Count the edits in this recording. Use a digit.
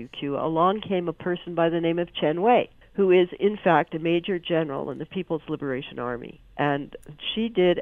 1